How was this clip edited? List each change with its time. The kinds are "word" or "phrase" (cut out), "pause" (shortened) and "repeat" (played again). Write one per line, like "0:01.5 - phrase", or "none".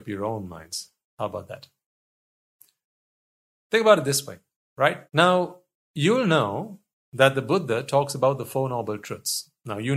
0:05.1 - pause